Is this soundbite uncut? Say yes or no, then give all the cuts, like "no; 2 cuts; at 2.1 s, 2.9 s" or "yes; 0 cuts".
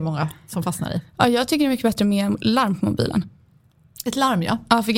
yes; 0 cuts